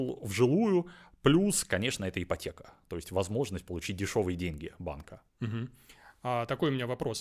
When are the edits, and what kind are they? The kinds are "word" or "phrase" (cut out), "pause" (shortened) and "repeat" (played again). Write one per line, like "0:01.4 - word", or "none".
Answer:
0:05.3 - pause